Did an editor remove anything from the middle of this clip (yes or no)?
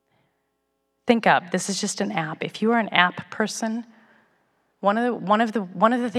no